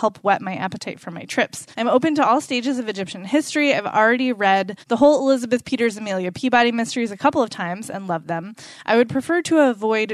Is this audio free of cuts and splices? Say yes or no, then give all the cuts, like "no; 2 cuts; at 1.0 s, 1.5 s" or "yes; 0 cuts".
no; 2 cuts; at 1.7 s, 4.8 s